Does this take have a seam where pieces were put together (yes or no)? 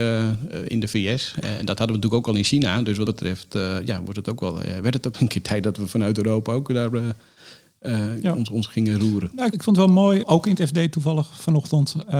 yes